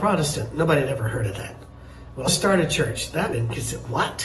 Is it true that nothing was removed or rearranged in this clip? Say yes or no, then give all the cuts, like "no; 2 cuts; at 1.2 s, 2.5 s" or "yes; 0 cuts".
no; 2 cuts; at 2.3 s, 3.3 s